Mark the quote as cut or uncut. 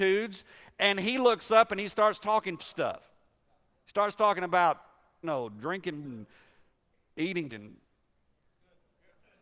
cut